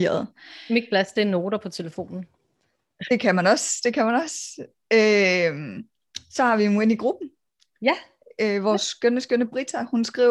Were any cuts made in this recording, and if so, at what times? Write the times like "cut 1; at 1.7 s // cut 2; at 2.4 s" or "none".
none